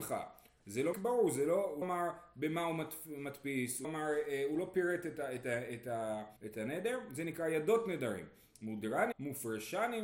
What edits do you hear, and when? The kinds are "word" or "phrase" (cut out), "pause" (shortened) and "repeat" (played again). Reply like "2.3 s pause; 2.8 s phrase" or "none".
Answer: 0.9 s word; 1.8 s word; 3.8 s word; 6.4 s pause; 9.1 s word